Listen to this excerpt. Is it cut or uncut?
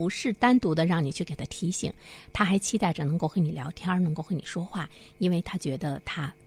uncut